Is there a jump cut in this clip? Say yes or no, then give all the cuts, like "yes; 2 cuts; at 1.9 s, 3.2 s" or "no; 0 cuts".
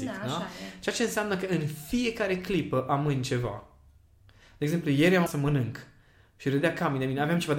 yes; 1 cut; at 5.3 s